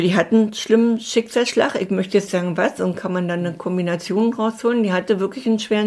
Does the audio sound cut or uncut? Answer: cut